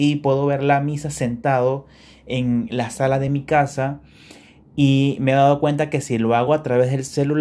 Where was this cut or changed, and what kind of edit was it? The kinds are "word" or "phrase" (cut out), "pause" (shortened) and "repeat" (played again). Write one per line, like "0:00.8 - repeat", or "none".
none